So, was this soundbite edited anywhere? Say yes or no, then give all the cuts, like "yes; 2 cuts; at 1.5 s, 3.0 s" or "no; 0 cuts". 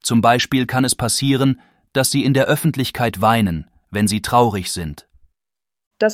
no; 0 cuts